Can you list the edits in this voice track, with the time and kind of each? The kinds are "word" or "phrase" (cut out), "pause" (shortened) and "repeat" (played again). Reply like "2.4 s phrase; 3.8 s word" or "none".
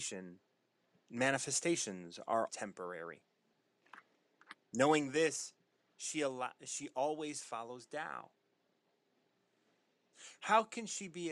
2.5 s word